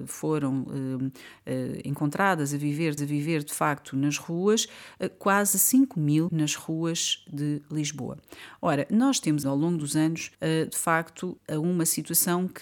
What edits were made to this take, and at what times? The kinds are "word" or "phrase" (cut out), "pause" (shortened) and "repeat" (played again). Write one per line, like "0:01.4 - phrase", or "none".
0:03.0 - repeat
0:06.3 - phrase
0:09.4 - word
0:10.3 - pause
0:11.4 - word